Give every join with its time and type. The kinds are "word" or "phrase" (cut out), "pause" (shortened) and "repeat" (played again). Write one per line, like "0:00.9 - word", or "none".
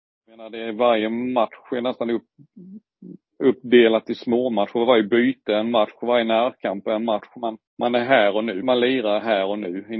0:07.7 - pause
0:08.6 - word